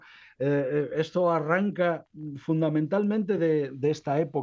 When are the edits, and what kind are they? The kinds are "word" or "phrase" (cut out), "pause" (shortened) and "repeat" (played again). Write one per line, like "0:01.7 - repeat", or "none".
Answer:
none